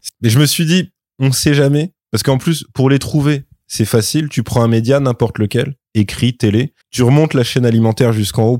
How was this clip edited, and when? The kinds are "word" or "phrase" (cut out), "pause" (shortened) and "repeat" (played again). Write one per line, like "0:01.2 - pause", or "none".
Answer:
0:02.0 - pause
0:06.8 - pause